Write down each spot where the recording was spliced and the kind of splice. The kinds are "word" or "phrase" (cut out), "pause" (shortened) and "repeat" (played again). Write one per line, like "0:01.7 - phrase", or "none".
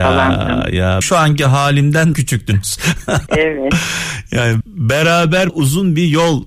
0:01.0 - word
0:02.1 - word
0:03.3 - word
0:04.6 - word
0:05.5 - word